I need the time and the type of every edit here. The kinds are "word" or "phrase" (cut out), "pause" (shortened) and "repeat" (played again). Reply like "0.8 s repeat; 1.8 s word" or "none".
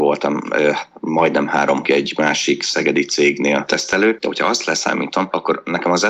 1.8 s word